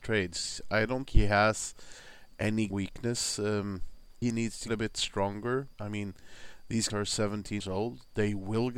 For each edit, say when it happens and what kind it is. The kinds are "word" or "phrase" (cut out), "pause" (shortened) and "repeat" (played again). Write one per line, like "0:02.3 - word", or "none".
0:01.0 - word
0:02.7 - word
0:04.2 - word
0:04.7 - word
0:05.8 - word
0:06.9 - word
0:07.6 - word